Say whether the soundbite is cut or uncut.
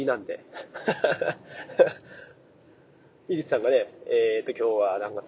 uncut